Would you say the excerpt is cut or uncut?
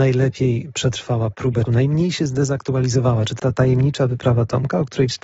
cut